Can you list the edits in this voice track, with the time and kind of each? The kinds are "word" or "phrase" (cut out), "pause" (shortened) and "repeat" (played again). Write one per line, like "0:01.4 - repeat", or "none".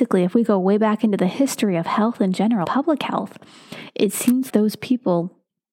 0:02.6 - word
0:04.5 - word